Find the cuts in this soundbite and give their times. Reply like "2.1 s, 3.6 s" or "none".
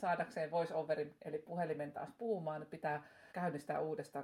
3.3 s